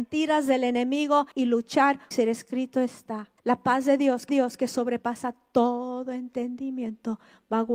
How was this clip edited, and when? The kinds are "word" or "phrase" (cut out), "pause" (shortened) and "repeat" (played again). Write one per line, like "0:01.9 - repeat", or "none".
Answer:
0:01.3 - pause
0:02.1 - phrase
0:03.4 - pause
0:04.3 - repeat